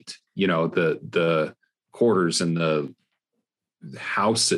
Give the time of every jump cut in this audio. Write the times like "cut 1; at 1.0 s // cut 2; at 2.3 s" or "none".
none